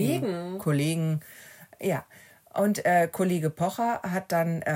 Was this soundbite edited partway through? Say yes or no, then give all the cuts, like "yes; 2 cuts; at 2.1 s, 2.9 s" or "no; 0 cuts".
no; 0 cuts